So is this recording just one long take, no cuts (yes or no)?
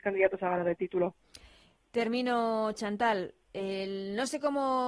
yes